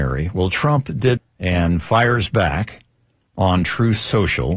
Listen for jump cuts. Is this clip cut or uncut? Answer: cut